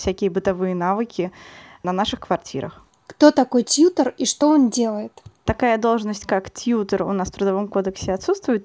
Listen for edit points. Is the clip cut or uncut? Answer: uncut